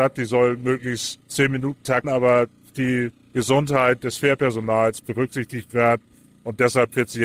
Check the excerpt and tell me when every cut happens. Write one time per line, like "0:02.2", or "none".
0:01.2
0:02.0
0:02.7
0:05.0